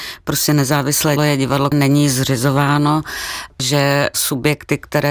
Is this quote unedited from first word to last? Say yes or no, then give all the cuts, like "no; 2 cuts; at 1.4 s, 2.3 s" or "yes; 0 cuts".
no; 3 cuts; at 1.2 s, 1.7 s, 3.6 s